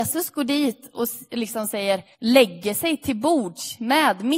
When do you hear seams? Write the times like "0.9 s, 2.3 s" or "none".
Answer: 2.1 s